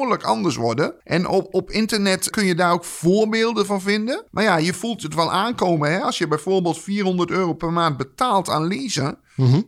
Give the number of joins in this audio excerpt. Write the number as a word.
three